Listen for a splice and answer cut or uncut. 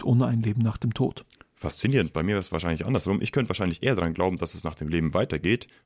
uncut